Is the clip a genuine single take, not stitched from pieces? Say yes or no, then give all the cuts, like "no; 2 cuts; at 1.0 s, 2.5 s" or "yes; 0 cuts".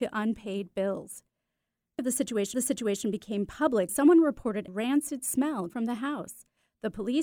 no; 5 cuts; at 2.0 s, 2.5 s, 3.9 s, 4.7 s, 5.7 s